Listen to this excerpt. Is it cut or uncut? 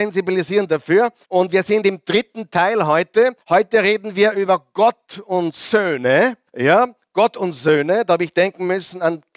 cut